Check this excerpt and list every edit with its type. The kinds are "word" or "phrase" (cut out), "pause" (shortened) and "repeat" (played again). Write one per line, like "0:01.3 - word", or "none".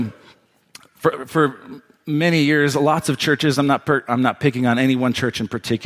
none